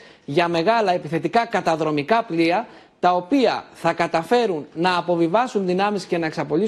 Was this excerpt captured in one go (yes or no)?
yes